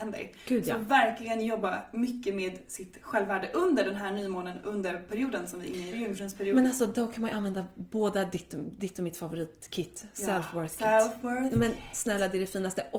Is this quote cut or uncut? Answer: cut